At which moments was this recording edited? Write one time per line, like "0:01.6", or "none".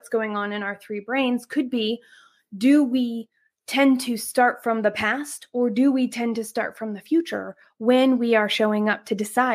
none